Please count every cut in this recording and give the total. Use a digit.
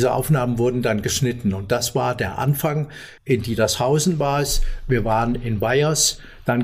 1